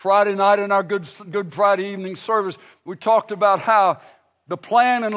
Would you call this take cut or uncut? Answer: uncut